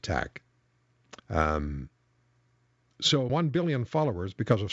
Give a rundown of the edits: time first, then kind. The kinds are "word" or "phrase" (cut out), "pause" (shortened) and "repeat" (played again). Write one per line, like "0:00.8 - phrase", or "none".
0:01.2 - pause
0:03.3 - phrase